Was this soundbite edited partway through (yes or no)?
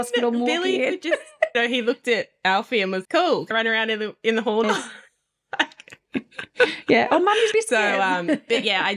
yes